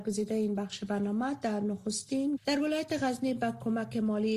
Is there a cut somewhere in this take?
yes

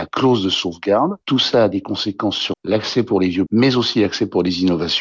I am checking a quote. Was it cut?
yes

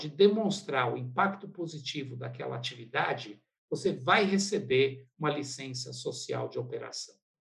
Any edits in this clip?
no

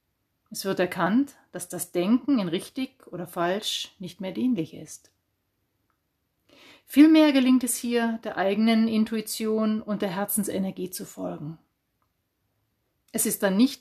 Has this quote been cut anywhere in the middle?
no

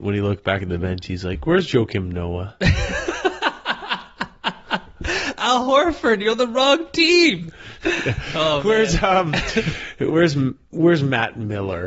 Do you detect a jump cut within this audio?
no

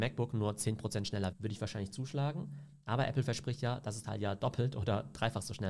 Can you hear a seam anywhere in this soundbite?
yes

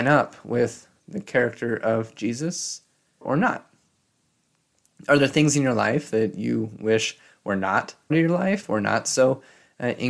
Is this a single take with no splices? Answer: no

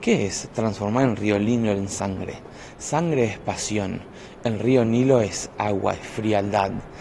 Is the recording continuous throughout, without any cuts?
yes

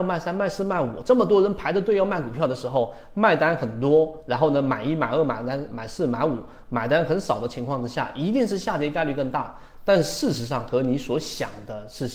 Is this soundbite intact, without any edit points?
yes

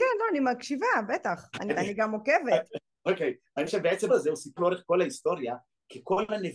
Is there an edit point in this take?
yes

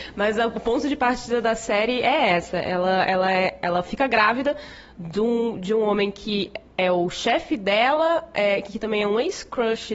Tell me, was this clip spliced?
no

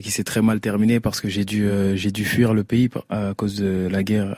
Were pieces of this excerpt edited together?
no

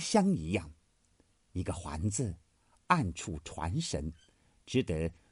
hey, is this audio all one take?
yes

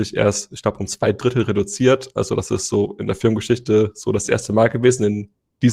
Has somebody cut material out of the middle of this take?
no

